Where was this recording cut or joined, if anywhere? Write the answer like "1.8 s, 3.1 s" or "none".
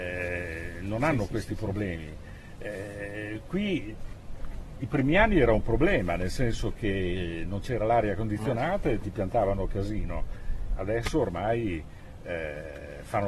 none